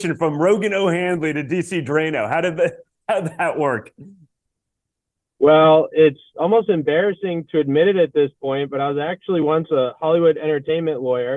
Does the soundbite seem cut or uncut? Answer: uncut